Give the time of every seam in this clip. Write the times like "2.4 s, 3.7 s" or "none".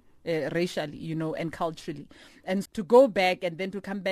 2.7 s